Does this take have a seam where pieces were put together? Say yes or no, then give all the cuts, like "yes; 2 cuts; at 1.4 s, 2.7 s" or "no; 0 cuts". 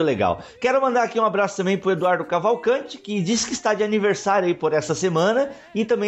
no; 0 cuts